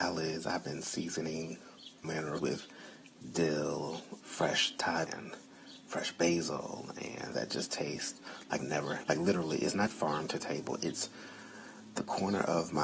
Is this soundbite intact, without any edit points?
no; 8 cuts; at 2.0 s, 2.4 s, 4.2 s, 5.1 s, 7.3 s, 8.6 s, 9.0 s, 9.9 s

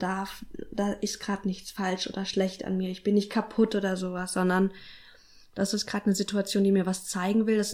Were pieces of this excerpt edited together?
no; 0 cuts

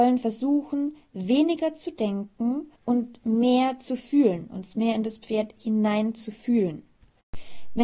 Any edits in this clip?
yes; 1 cut; at 2.8 s

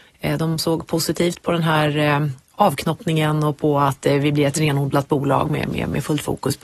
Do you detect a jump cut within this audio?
no; 0 cuts

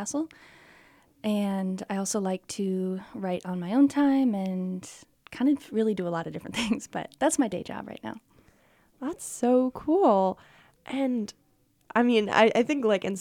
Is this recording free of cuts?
yes; 0 cuts

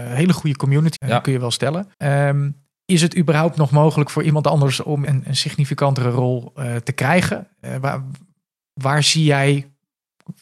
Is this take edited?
yes; 3 cuts; at 1.0 s, 1.9 s, 5.1 s

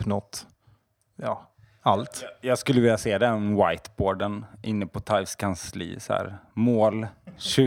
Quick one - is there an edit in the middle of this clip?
no; 0 cuts

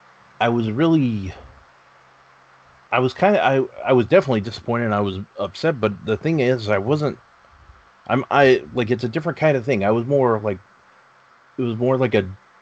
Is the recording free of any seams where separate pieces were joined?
yes; 0 cuts

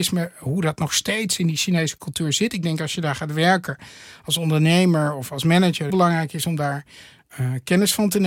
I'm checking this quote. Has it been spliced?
yes; 1 cut; at 5.9 s

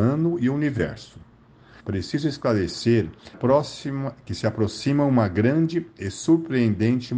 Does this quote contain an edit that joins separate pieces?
yes; 2 cuts; at 1.8 s, 3.3 s

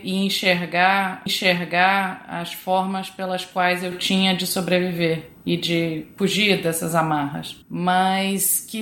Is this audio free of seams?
no; 2 cuts; at 1.3 s, 7.6 s

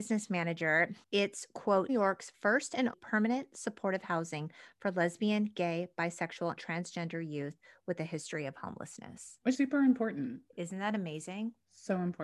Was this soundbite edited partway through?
yes; 4 cuts; at 1.9 s, 2.9 s, 6.6 s, 9.5 s

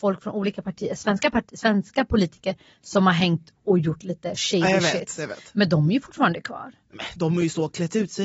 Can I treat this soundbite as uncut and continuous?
yes; 0 cuts

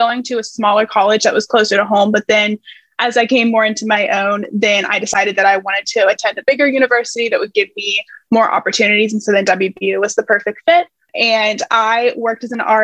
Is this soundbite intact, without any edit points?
yes; 0 cuts

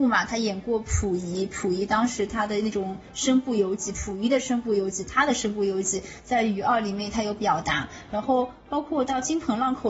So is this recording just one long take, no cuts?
yes; 0 cuts

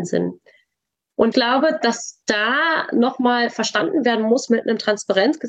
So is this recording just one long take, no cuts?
no; 2 cuts; at 1.3 s, 4.5 s

